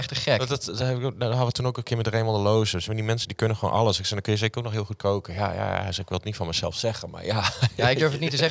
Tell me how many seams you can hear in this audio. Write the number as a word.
zero